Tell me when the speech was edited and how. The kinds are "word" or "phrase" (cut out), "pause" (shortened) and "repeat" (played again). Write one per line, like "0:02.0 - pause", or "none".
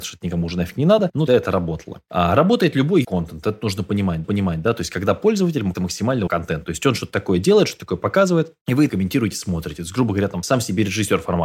0:01.3 - word
0:03.0 - word
0:04.2 - repeat
0:05.7 - word
0:06.3 - phrase
0:08.9 - word